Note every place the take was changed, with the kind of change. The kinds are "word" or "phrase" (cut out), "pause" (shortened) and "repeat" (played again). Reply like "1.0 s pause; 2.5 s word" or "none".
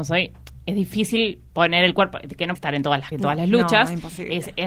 2.6 s word; 3.1 s word